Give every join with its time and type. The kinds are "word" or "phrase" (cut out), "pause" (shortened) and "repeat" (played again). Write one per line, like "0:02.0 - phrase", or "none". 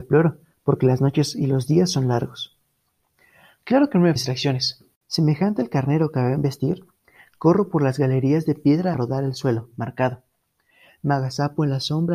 0:04.2 - word
0:08.9 - word